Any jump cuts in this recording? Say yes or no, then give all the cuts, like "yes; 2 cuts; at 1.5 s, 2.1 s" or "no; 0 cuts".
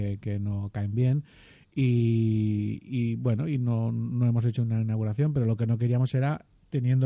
no; 0 cuts